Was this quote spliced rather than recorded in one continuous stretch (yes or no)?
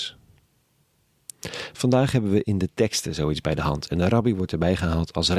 no